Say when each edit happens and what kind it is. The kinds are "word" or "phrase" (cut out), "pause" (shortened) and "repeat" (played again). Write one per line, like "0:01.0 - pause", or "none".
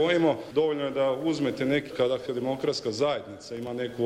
0:01.9 - word
0:02.3 - word

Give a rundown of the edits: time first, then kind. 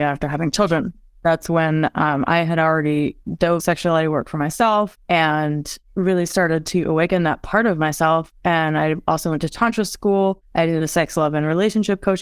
0:00.9 - word
0:03.6 - word

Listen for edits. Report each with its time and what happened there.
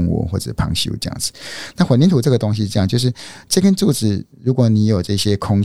none

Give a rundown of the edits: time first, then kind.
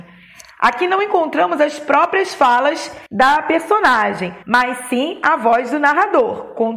0:03.1 - pause
0:04.4 - pause

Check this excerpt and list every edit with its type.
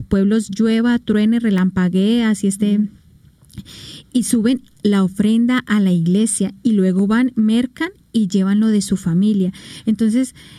none

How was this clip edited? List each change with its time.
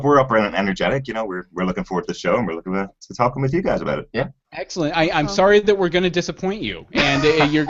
0:02.7 - phrase

